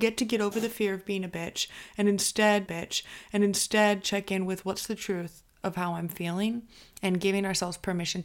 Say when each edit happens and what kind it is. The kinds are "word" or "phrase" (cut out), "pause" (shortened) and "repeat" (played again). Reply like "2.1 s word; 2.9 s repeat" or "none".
2.7 s repeat